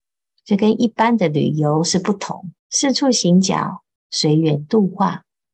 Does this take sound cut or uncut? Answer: cut